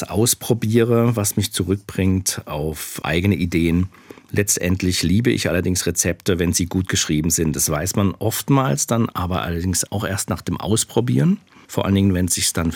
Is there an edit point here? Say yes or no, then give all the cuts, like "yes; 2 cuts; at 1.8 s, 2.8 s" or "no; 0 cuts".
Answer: no; 0 cuts